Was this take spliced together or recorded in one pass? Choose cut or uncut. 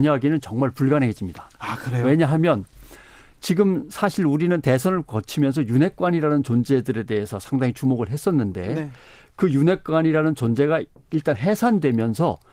uncut